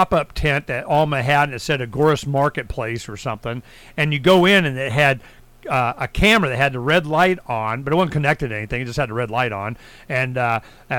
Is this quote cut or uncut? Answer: uncut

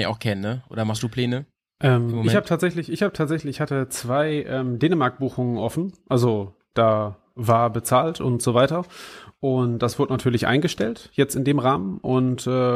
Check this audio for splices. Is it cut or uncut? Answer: uncut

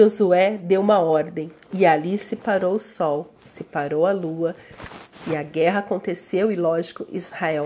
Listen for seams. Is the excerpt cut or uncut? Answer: uncut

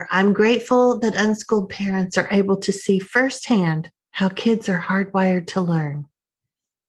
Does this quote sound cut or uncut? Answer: uncut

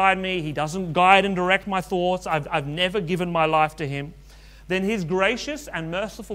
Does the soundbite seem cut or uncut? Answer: uncut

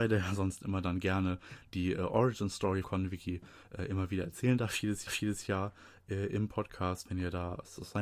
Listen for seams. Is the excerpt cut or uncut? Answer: cut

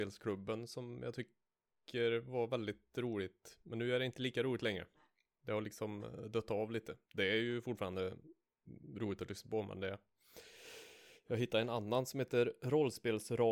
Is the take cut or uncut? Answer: uncut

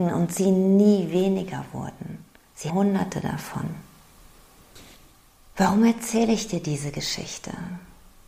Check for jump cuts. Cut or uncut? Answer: cut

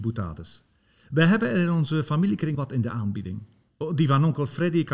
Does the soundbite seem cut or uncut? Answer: cut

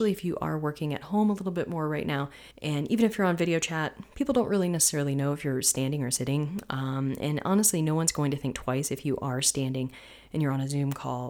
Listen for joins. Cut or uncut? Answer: cut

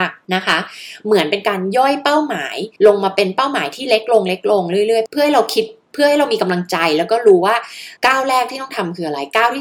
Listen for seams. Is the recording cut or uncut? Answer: cut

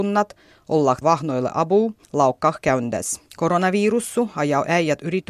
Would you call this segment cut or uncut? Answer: cut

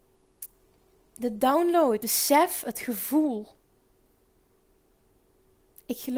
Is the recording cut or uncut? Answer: cut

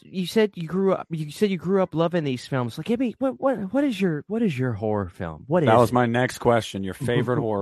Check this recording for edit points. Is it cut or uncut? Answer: uncut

